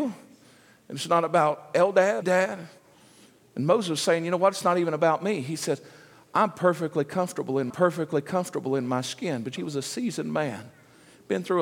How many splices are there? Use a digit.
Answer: 3